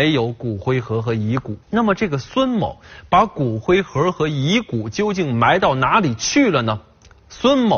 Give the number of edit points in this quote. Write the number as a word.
one